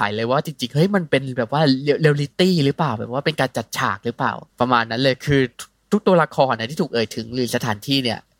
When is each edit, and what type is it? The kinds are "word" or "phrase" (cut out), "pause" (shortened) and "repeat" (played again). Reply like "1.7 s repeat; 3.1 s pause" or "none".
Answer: 4.5 s pause